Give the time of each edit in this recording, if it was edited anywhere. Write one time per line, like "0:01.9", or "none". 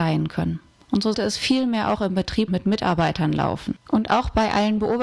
0:01.1
0:02.5
0:03.9

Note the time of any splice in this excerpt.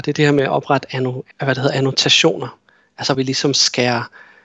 0:01.3
0:03.1

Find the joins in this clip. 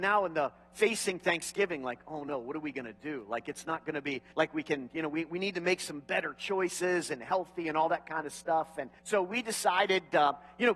0:04.3
0:09.0

